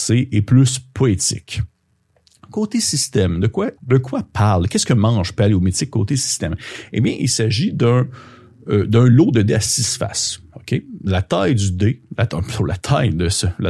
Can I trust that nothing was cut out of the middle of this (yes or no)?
no